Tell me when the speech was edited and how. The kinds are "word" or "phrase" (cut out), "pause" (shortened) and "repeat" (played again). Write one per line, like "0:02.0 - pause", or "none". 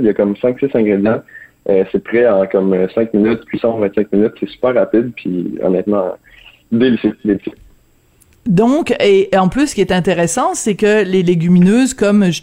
none